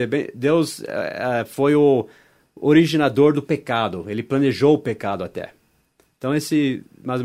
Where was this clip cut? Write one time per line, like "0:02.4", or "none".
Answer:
none